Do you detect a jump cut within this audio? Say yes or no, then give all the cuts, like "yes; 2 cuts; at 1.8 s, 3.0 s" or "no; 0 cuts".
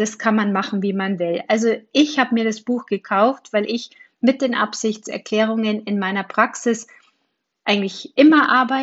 no; 0 cuts